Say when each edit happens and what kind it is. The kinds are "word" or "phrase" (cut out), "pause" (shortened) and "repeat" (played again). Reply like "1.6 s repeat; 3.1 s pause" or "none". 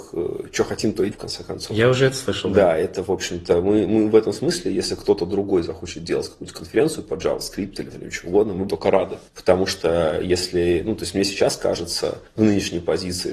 1.1 s word; 7.9 s word; 8.7 s word